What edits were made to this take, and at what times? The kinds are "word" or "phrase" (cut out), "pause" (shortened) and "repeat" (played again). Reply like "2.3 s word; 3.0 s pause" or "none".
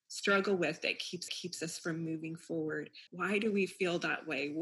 1.3 s repeat; 3.1 s pause

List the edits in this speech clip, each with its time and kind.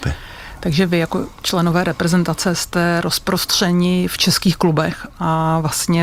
none

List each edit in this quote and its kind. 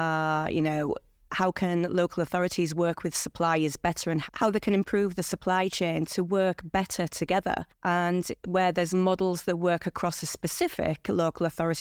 none

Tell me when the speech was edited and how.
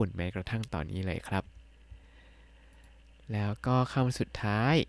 none

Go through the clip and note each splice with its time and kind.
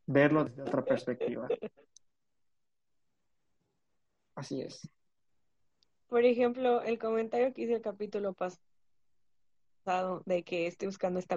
none

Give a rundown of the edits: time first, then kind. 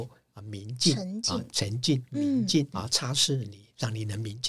2.7 s phrase

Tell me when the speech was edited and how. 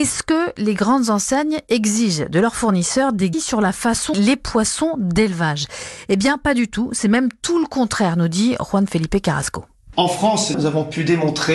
3.3 s word; 4.1 s phrase

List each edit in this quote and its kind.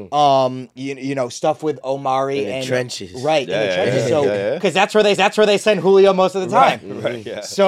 1.8 s word; 5.2 s repeat

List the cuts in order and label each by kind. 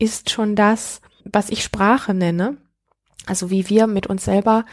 1.2 s word

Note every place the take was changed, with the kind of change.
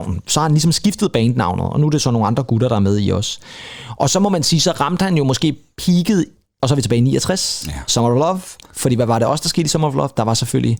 none

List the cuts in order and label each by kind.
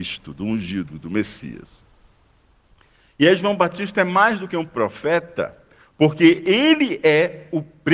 none

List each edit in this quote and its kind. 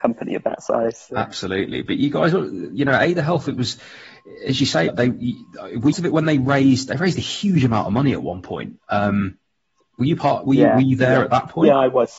4.9 s phrase; 5.9 s phrase; 8.8 s pause

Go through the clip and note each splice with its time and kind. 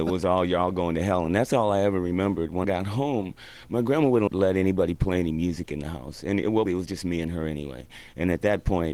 2.6 s word; 4.3 s word; 6.7 s word

